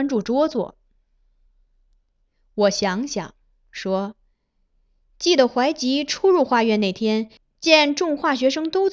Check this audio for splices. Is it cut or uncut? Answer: uncut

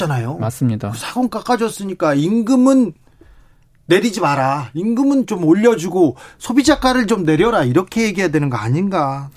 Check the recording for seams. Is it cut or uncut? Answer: uncut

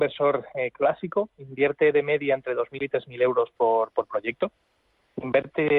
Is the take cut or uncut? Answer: uncut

